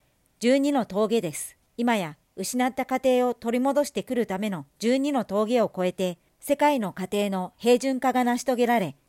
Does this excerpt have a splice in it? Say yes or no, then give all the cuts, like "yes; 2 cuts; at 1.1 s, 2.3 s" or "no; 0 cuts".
yes; 3 cuts; at 1.7 s, 4.7 s, 6.3 s